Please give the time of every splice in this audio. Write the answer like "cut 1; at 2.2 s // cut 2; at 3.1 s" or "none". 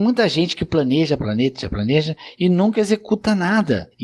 cut 1; at 1.2 s

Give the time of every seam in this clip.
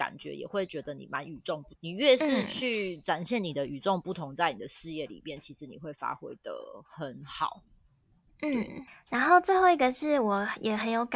cut 1; at 1.7 s

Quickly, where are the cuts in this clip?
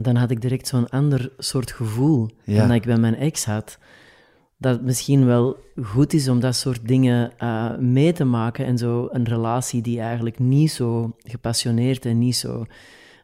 none

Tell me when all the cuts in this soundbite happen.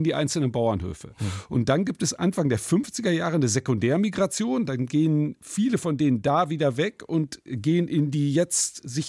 none

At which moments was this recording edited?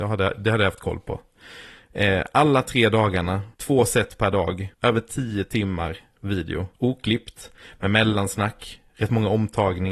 cut 1; at 3.5 s // cut 2; at 4.7 s // cut 3; at 6.7 s

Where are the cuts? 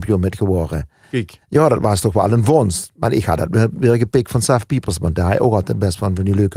cut 1; at 1.4 s

